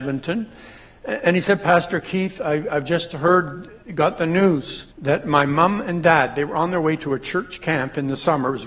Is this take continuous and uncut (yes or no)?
no